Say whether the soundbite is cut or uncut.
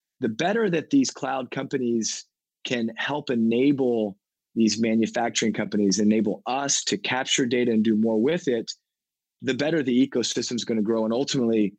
uncut